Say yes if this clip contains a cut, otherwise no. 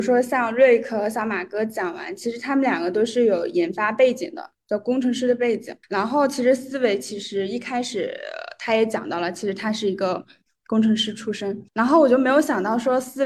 yes